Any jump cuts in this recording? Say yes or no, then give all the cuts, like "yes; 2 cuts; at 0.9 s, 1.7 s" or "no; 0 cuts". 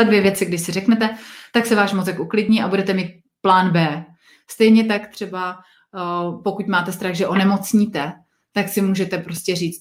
no; 0 cuts